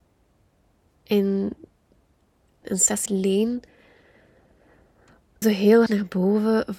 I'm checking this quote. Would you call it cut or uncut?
cut